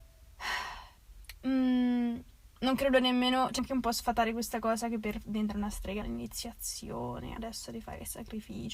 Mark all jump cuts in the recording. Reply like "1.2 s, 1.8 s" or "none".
2.5 s, 3.6 s, 6.0 s, 7.4 s

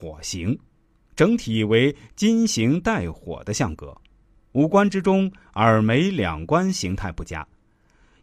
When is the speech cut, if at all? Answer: none

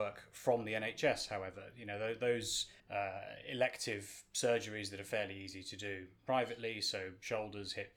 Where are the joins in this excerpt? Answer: 2.8 s

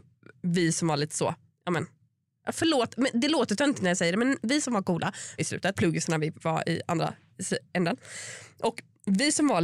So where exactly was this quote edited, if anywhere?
1.5 s, 5.4 s, 5.7 s, 6.4 s

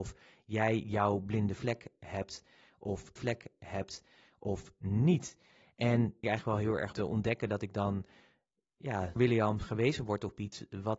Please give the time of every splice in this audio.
3.2 s, 6.2 s, 6.9 s, 9.2 s

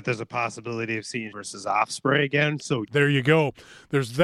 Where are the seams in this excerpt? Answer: 1.3 s, 2.8 s

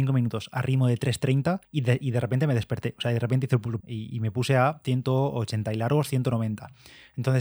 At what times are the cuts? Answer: 1.6 s, 3.8 s

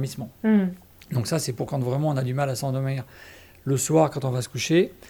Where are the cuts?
none

